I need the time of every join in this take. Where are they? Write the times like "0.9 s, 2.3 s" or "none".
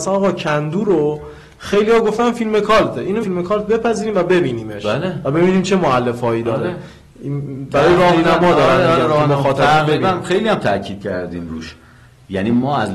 3.2 s